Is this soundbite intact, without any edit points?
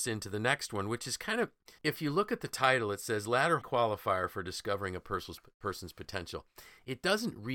no; 2 cuts; at 1.8 s, 3.6 s

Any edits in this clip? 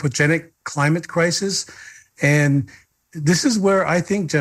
no; 0 cuts

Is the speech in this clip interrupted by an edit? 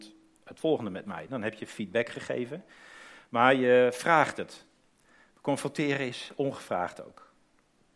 no; 0 cuts

